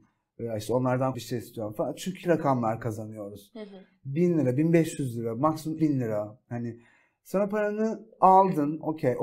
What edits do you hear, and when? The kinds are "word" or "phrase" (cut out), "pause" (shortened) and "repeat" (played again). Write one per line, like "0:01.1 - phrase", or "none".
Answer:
0:01.1 - phrase
0:02.2 - phrase
0:05.8 - word